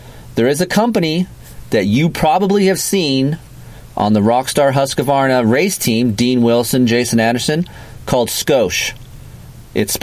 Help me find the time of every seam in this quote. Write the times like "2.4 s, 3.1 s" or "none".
none